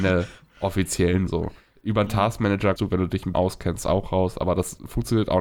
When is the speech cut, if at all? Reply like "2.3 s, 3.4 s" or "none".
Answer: 1.3 s, 2.8 s, 3.3 s